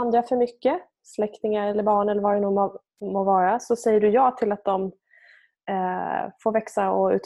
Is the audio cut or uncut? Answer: uncut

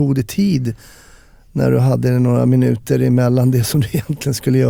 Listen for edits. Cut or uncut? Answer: uncut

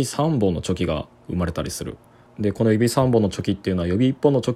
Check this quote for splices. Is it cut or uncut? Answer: uncut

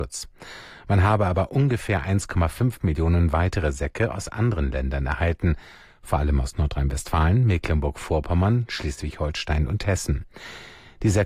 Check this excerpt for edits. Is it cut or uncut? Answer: uncut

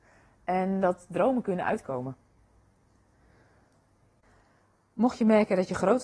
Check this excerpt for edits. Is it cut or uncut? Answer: uncut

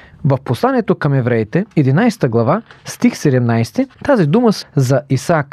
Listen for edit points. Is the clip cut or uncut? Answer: cut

